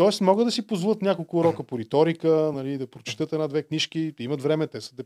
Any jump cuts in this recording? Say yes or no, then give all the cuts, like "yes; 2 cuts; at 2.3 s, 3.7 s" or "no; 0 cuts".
no; 0 cuts